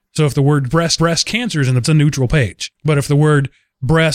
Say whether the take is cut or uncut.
cut